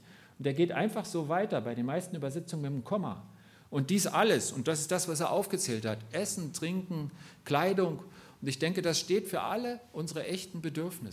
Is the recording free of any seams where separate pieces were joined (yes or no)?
yes